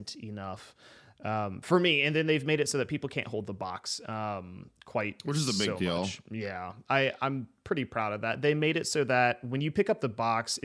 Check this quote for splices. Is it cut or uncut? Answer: uncut